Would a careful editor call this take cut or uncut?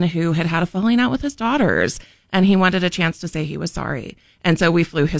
uncut